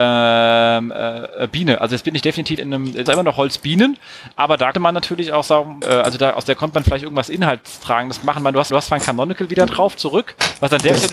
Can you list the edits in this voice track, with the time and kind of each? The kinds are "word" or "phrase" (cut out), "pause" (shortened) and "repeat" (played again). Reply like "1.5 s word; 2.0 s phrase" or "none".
2.6 s word; 3.1 s word; 4.7 s word; 5.8 s phrase; 8.7 s repeat